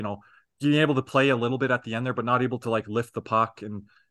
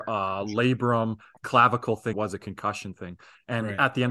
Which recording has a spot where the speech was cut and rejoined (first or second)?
second